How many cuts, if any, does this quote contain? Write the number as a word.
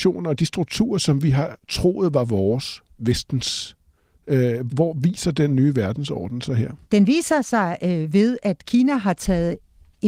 two